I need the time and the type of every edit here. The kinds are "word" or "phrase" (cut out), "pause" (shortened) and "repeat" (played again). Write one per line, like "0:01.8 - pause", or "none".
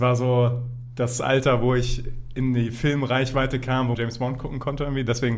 0:03.9 - word